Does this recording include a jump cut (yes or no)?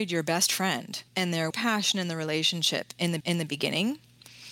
yes